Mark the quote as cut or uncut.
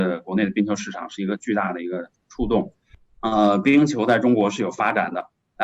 uncut